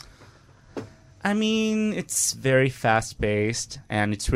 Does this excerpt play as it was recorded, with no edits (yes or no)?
yes